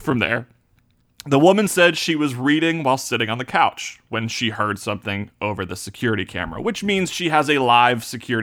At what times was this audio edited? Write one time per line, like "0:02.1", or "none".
none